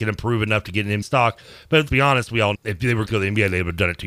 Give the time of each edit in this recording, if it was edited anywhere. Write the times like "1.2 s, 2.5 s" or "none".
1.0 s, 1.9 s, 2.5 s, 3.1 s